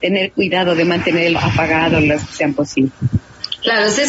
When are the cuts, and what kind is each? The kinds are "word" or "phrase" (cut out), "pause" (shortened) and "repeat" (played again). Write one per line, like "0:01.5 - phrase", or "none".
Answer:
0:01.4 - word
0:02.3 - word